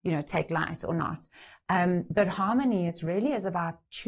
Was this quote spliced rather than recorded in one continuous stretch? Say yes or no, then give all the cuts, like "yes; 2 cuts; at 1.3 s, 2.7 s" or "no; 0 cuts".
no; 0 cuts